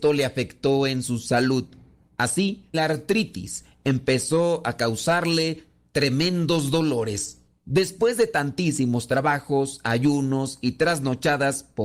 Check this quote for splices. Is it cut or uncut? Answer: cut